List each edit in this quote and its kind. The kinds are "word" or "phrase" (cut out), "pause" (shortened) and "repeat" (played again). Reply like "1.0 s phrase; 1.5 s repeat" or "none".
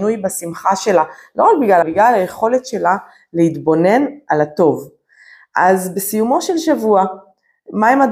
1.8 s phrase